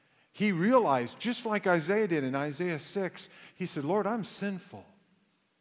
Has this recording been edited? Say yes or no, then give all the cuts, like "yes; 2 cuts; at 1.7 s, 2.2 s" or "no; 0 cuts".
no; 0 cuts